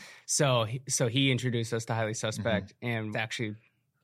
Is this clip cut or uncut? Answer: cut